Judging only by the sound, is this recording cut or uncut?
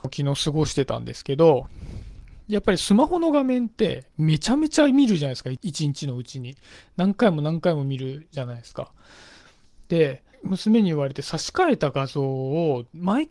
cut